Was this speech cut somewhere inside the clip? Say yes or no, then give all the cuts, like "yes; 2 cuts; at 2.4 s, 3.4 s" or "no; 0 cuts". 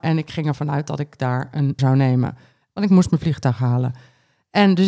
yes; 1 cut; at 1.8 s